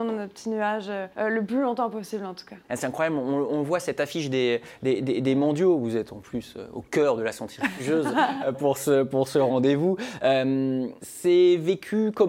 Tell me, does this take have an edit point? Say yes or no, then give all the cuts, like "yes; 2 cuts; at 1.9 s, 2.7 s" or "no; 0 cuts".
yes; 3 cuts; at 1.1 s, 2.6 s, 11.0 s